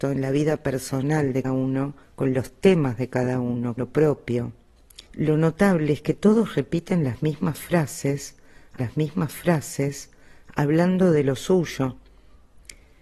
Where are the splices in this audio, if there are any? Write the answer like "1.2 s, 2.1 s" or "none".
1.4 s, 2.0 s, 3.8 s, 5.1 s, 8.8 s